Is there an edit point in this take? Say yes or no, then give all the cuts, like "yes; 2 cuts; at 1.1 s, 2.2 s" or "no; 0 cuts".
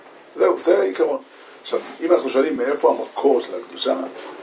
no; 0 cuts